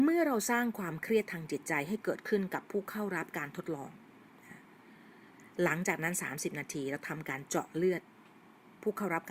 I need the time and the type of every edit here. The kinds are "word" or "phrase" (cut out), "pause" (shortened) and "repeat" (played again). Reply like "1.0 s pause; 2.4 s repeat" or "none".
none